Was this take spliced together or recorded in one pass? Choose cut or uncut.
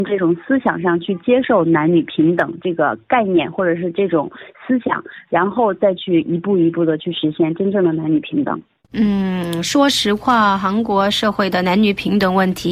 uncut